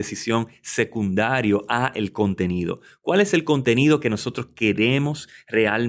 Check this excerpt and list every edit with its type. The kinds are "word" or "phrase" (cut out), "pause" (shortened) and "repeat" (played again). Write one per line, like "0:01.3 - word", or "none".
none